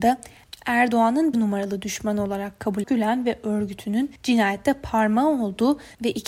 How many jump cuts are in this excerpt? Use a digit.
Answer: 3